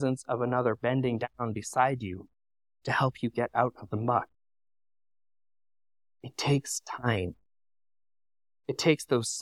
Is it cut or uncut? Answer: uncut